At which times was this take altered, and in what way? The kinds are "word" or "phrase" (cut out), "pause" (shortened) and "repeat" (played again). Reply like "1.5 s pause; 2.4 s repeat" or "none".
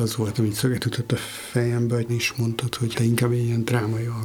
2.1 s phrase; 3.0 s word